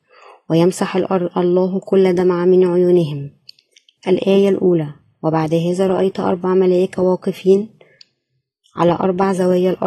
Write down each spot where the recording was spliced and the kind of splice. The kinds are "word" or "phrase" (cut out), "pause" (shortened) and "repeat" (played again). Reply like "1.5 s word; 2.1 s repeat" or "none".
4.0 s word